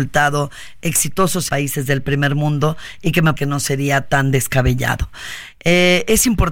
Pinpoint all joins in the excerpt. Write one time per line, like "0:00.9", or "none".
0:01.5
0:03.4